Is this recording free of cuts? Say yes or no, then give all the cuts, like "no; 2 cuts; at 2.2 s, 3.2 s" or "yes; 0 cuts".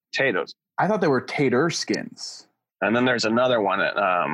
yes; 0 cuts